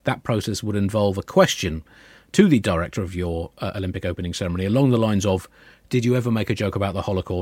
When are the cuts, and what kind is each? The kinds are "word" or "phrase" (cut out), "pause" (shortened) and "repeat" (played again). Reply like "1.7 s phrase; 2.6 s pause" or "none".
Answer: none